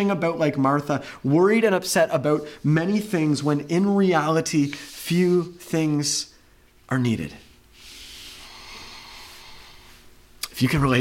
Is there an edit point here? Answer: no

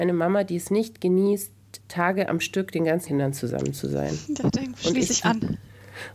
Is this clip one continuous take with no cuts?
no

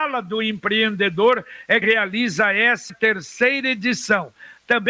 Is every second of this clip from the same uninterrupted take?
no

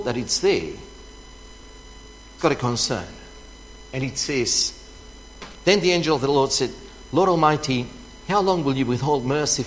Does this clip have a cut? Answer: yes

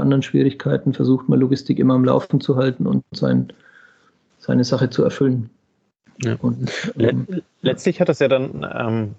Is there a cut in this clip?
yes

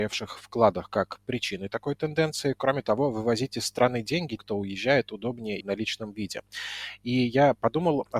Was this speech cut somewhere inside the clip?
yes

